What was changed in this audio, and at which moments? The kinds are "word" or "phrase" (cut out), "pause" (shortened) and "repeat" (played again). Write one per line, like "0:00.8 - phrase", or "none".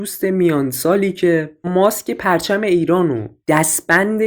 0:01.6 - word